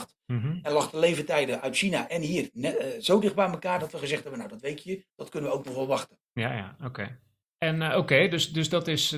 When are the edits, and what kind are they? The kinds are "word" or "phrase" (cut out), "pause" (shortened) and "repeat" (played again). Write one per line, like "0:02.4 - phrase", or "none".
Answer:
0:05.1 - pause
0:07.4 - pause